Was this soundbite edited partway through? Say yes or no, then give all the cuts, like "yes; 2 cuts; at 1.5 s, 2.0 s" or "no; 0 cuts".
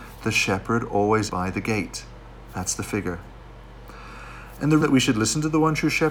yes; 2 cuts; at 1.3 s, 4.8 s